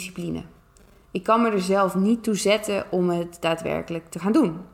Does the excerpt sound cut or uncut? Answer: uncut